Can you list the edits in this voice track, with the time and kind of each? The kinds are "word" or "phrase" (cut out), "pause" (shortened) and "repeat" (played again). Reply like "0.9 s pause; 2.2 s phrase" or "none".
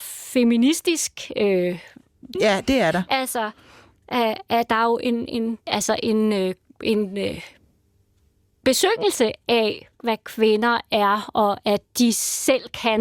2.3 s phrase; 5.6 s pause; 9.9 s word

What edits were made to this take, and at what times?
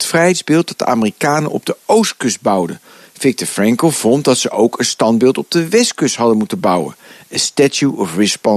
none

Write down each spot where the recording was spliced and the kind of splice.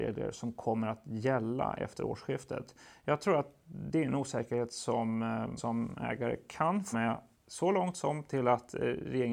5.6 s word; 6.9 s word

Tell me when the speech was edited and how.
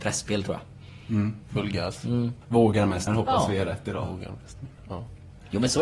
1.4 s pause; 2.4 s pause; 3.1 s word

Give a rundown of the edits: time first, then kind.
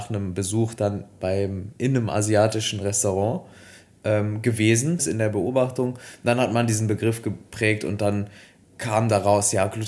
5.0 s word; 8.6 s word

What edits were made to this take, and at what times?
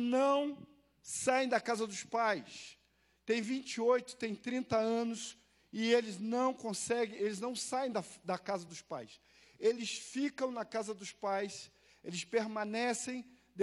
none

